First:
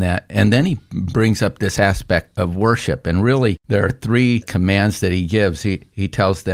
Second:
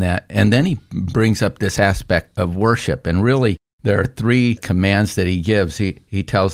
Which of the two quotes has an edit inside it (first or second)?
first